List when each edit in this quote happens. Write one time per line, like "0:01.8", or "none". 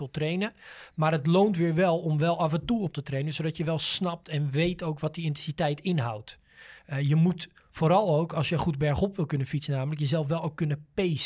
0:02.9
0:06.8